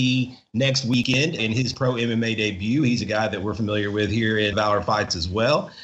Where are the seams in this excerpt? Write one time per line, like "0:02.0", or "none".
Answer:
0:01.4
0:04.5